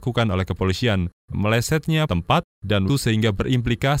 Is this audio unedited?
no; 3 cuts; at 1.3 s, 2.1 s, 2.9 s

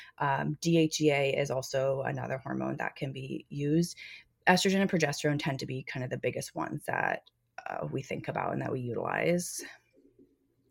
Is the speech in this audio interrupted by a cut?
no; 0 cuts

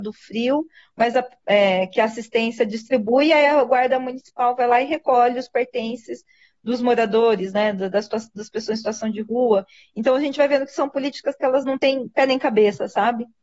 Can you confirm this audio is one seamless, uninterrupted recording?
yes; 0 cuts

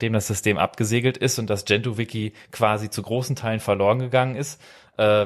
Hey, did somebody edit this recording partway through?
no; 0 cuts

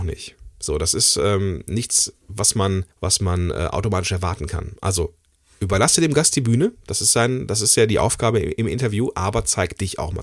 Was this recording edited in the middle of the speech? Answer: yes; 1 cut; at 2.9 s

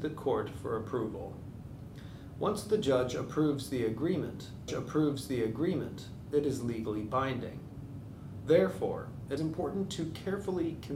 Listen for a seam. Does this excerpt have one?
yes; 2 cuts; at 4.7 s, 9.4 s

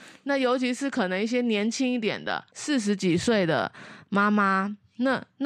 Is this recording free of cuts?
no; 1 cut; at 2.5 s

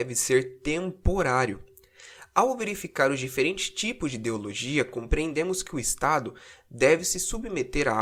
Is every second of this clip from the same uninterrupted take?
yes; 0 cuts

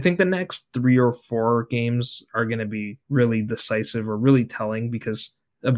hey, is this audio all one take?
no; 1 cut; at 3.0 s

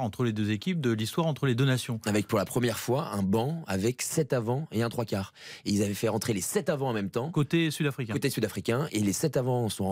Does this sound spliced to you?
no; 0 cuts

